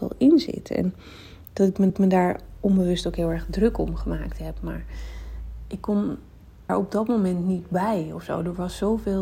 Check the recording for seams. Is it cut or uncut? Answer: cut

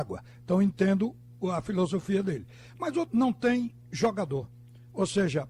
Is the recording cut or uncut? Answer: cut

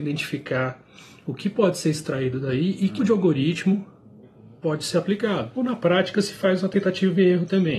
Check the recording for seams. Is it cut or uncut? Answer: cut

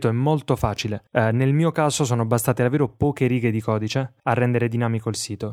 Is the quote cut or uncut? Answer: cut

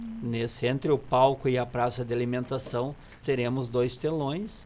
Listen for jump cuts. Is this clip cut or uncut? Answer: cut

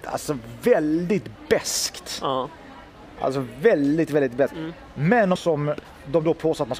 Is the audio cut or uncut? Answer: cut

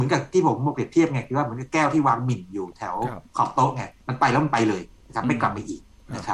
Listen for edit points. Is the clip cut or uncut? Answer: uncut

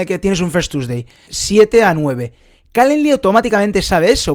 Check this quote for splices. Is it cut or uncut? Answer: cut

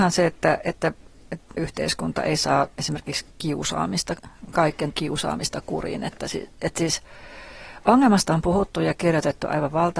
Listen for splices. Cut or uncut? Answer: cut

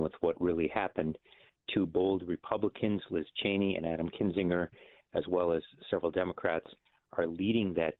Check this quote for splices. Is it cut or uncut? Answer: uncut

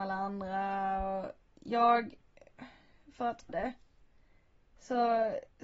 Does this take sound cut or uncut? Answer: cut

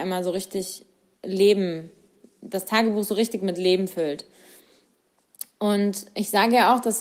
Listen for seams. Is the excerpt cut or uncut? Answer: uncut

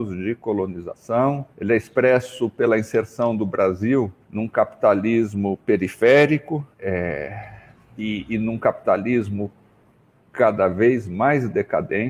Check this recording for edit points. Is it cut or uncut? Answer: cut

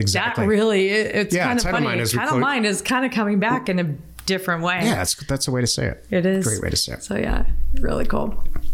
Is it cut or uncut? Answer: uncut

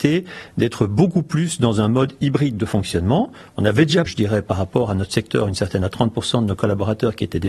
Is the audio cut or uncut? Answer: cut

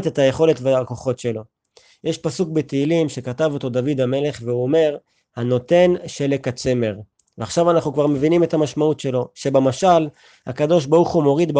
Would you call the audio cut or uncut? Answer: uncut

